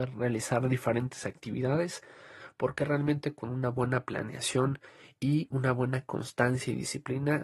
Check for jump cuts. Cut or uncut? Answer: uncut